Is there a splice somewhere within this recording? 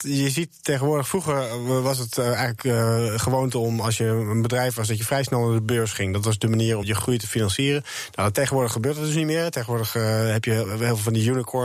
yes; 1 cut; at 6.8 s

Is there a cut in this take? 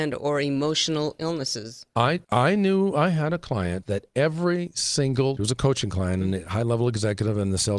yes; 3 cuts; at 2.2 s, 3.8 s, 5.4 s

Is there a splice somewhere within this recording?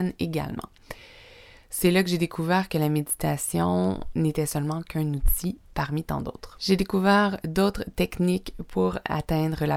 no; 0 cuts

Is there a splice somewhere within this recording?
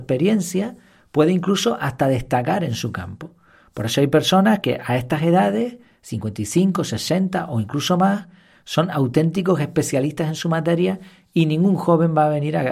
no; 0 cuts

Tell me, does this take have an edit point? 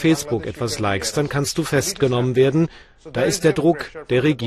no; 0 cuts

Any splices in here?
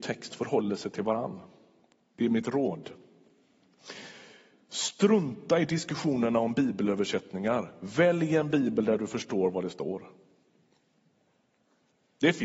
no; 0 cuts

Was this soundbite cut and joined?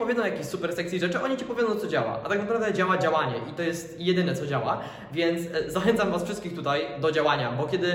no; 0 cuts

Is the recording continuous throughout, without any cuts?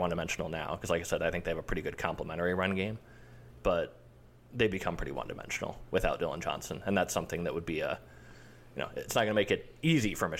yes; 0 cuts

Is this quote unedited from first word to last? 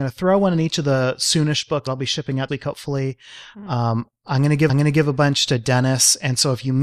no; 3 cuts; at 1.9 s, 2.5 s, 4.7 s

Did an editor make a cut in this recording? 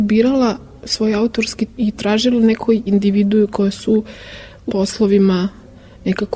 yes; 3 cuts; at 1.8 s, 2.9 s, 4.7 s

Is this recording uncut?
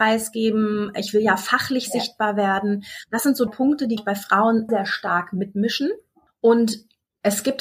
no; 3 cuts; at 3.5 s, 4.0 s, 4.7 s

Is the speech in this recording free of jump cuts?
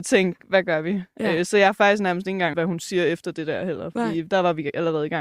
no; 1 cut; at 2.5 s

